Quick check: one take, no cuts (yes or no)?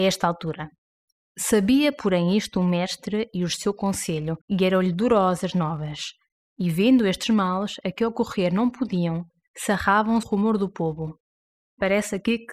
no